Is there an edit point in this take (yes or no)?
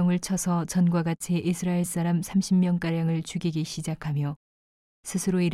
no